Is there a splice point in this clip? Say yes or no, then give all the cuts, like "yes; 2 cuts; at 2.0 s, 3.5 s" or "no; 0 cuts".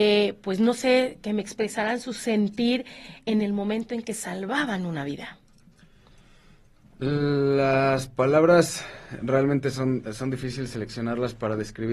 no; 0 cuts